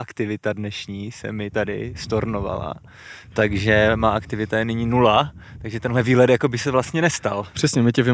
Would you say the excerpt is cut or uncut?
uncut